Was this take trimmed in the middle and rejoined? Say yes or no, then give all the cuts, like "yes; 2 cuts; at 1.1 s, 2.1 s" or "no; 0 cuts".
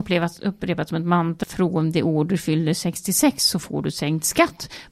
yes; 1 cut; at 1.4 s